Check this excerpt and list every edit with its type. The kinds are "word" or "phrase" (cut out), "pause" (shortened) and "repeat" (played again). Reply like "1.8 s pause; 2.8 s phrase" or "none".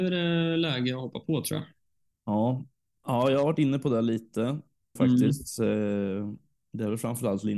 5.0 s word